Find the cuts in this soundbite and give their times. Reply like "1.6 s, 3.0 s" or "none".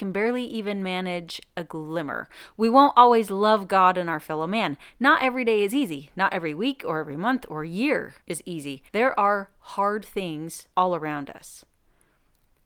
8.2 s, 8.9 s, 10.7 s